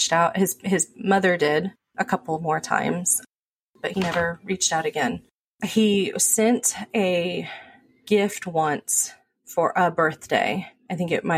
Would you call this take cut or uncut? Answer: uncut